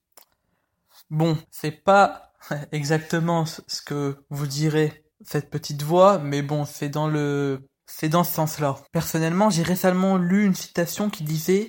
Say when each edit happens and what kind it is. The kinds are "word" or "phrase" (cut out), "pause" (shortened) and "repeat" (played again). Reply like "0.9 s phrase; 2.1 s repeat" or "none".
1.4 s pause; 5.1 s pause; 7.8 s pause; 8.9 s pause